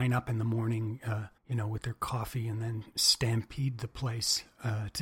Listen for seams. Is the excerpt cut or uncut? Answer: cut